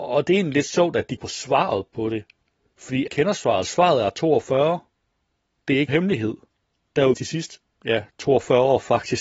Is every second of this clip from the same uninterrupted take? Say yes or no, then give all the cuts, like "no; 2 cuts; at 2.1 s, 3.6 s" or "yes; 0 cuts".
no; 4 cuts; at 1.2 s, 3.1 s, 5.9 s, 7.1 s